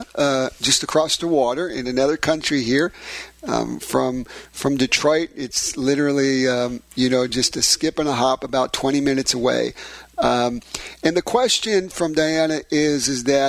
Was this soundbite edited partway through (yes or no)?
no